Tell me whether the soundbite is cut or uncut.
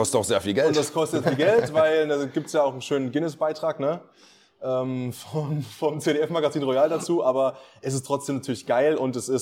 cut